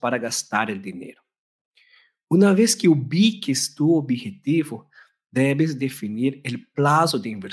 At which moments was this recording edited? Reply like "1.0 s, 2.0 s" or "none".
none